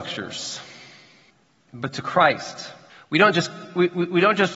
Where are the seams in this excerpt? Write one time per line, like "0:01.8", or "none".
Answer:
0:01.3
0:02.9